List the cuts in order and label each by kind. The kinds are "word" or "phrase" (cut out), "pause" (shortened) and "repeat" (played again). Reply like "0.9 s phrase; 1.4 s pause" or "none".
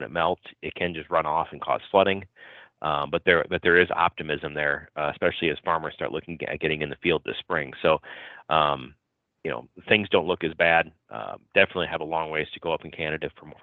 none